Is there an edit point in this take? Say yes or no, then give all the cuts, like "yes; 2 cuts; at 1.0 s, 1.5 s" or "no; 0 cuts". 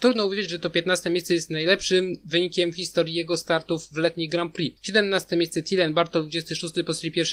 no; 0 cuts